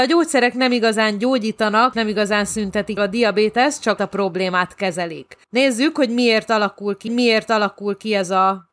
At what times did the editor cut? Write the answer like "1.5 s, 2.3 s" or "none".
1.9 s, 3.0 s, 4.0 s, 5.4 s, 7.1 s